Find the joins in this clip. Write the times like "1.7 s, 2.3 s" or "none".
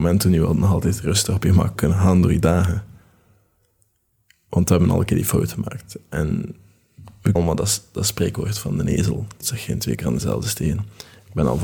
1.8 s, 7.4 s, 9.4 s